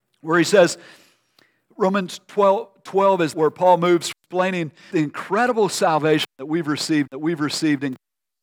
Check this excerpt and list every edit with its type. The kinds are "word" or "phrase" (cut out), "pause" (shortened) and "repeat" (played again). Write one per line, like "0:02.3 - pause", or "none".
0:03.3 - phrase
0:04.1 - word
0:04.9 - word
0:07.1 - repeat